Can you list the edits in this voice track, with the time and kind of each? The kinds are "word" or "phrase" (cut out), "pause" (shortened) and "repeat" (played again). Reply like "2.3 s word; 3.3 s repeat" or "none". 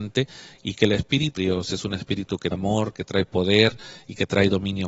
1.4 s word; 2.5 s word

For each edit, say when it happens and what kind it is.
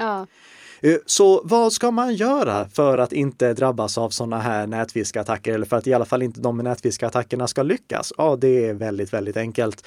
none

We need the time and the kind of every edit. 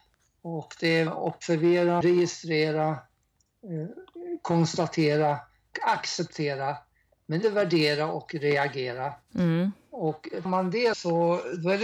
1.1 s word; 2.0 s word; 5.7 s word; 7.4 s word; 10.5 s word; 10.9 s word

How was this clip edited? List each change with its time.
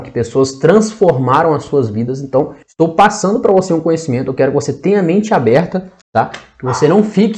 2.6 s pause; 6.0 s pause

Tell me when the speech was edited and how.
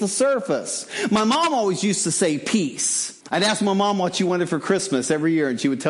3.2 s pause

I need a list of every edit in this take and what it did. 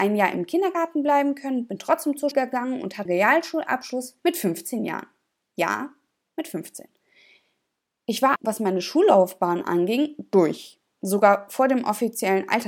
2.3 s word; 3.1 s word; 4.2 s pause; 8.4 s word

